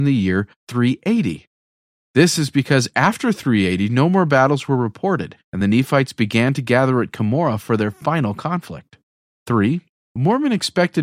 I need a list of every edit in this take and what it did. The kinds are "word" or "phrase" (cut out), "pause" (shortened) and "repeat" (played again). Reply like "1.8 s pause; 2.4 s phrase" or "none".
none